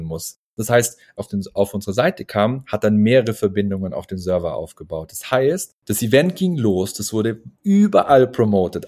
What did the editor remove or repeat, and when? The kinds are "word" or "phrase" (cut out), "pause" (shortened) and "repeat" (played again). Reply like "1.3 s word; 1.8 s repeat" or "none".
1.2 s phrase; 5.8 s pause; 7.5 s pause